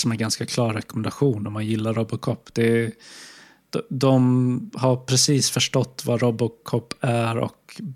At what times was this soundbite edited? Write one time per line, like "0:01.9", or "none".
none